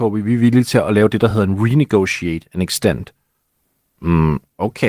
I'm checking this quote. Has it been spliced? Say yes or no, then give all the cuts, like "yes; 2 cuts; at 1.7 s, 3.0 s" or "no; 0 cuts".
no; 0 cuts